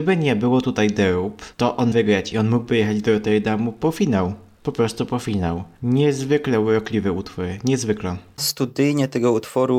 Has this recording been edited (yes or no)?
yes